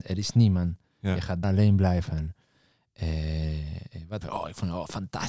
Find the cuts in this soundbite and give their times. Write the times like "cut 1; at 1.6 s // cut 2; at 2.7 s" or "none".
cut 1; at 1.4 s // cut 2; at 4.2 s